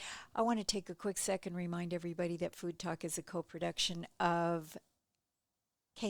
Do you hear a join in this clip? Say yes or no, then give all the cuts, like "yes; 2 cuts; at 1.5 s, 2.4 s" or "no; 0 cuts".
no; 0 cuts